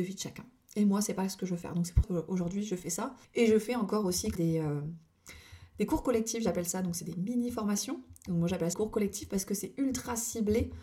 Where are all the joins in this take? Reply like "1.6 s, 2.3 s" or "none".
2.0 s, 3.2 s, 4.3 s, 8.7 s

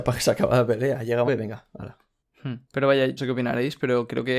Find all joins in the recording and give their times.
1.3 s, 2.6 s, 3.2 s

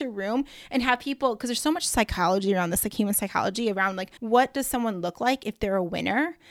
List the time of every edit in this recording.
4.2 s

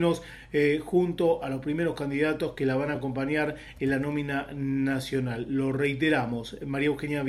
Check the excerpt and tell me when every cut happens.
none

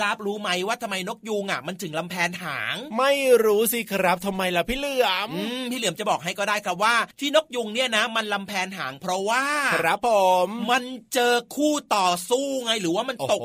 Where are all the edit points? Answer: 7.1 s

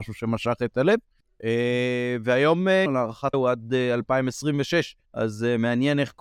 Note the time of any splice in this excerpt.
2.9 s, 3.3 s, 5.0 s

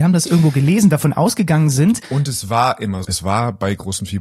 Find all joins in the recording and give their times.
3.0 s

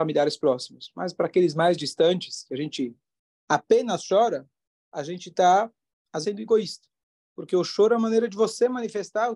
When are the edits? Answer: 6.2 s

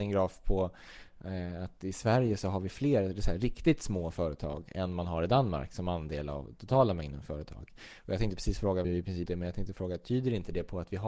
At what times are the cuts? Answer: 8.8 s, 9.3 s

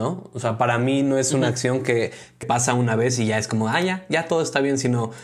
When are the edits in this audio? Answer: 2.4 s

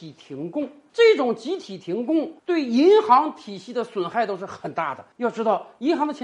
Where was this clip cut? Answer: 2.4 s, 5.1 s

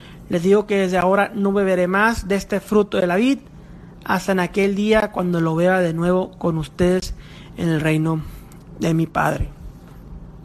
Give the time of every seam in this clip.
none

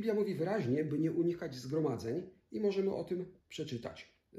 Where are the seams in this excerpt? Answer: 3.4 s

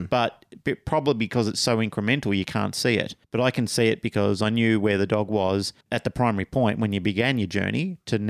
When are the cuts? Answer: 3.2 s, 5.8 s

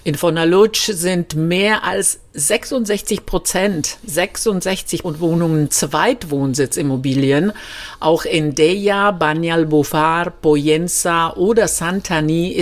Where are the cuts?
5.0 s

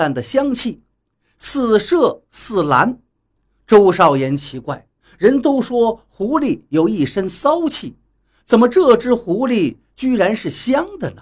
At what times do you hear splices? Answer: 5.0 s

